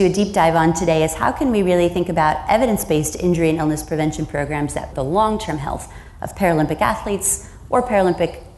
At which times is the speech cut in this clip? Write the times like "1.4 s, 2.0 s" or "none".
4.9 s